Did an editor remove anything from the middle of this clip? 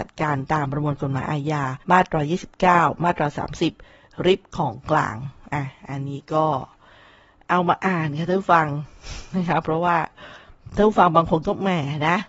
yes; 1 cut; at 1.8 s

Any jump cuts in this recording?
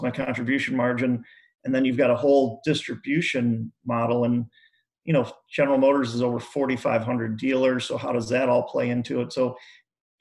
no; 0 cuts

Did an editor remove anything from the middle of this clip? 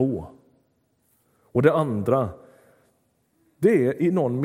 no; 0 cuts

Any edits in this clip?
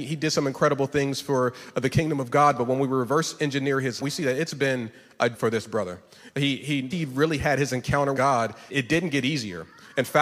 yes; 5 cuts; at 4.0 s, 5.3 s, 6.9 s, 8.1 s, 8.7 s

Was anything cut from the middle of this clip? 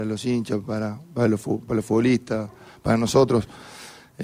no; 0 cuts

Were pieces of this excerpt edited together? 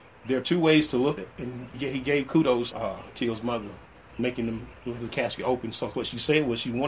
yes; 7 cuts; at 1.2 s, 1.7 s, 2.7 s, 3.1 s, 4.1 s, 5.0 s, 5.9 s

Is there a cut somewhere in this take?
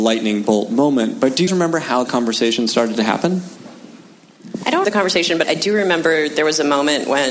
yes; 4 cuts; at 1.5 s, 2.0 s, 4.8 s, 5.4 s

